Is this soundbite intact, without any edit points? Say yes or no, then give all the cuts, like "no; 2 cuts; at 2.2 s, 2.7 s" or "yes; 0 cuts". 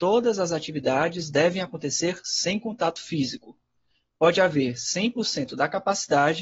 yes; 0 cuts